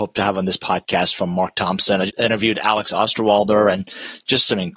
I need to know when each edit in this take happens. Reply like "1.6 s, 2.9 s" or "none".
2.1 s